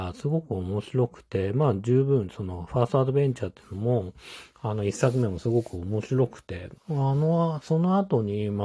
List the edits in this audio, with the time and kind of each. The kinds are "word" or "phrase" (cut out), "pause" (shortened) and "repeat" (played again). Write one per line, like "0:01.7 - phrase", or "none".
0:04.5 - pause
0:06.7 - word